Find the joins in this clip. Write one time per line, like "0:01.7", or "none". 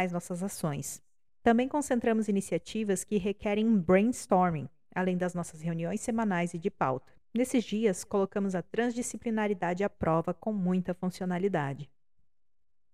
0:01.3
0:07.2